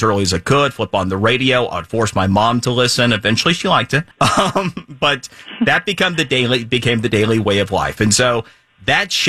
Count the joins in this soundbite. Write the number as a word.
one